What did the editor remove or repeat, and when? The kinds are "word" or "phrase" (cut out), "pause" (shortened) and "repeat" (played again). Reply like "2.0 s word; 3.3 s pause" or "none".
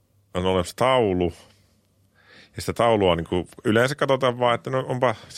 none